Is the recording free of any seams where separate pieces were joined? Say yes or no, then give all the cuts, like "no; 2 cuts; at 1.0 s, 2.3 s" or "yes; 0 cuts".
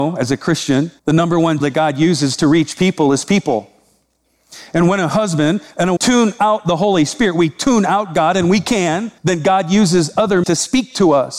no; 5 cuts; at 1.0 s, 1.6 s, 6.0 s, 9.2 s, 10.4 s